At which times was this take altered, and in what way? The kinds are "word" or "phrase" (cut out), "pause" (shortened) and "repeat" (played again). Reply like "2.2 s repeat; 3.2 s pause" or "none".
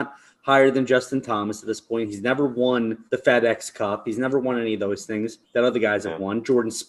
3.1 s pause; 5.4 s pause